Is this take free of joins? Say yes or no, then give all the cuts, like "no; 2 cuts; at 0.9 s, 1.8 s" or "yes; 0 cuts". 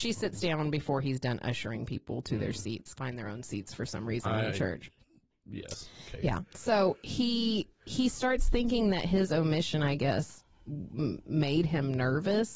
no; 1 cut; at 3.0 s